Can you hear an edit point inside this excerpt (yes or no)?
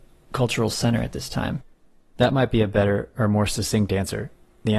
no